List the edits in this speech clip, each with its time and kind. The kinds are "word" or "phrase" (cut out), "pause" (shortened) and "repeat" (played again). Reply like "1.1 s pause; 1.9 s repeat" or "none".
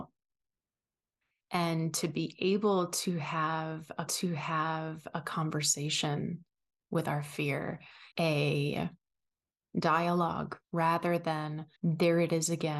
4.1 s repeat; 8.1 s pause; 10.6 s pause; 11.8 s pause